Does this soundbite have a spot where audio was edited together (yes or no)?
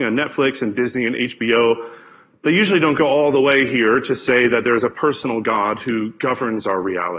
no